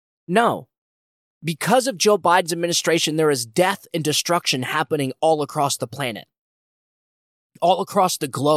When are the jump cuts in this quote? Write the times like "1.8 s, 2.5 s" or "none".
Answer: none